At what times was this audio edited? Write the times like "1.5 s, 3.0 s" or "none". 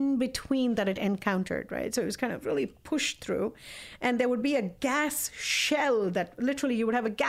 none